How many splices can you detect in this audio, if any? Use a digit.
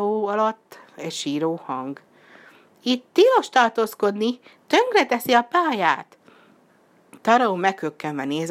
0